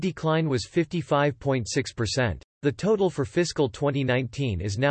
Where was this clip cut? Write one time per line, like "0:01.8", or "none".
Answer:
0:02.5